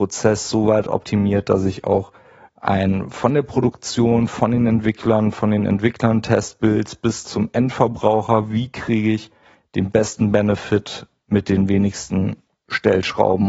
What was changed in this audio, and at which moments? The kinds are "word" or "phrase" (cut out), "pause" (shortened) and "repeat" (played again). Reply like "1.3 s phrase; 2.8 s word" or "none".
7.2 s word